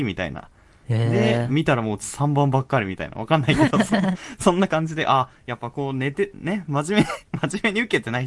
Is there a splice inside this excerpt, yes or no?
no